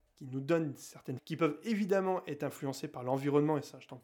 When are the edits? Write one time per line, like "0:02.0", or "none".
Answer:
0:01.2